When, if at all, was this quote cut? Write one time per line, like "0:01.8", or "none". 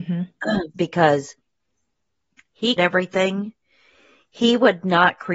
0:02.8